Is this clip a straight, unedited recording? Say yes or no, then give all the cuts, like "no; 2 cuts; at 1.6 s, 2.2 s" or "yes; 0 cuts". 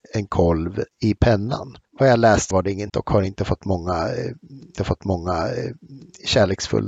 no; 5 cuts; at 0.9 s, 1.8 s, 2.5 s, 2.9 s, 4.8 s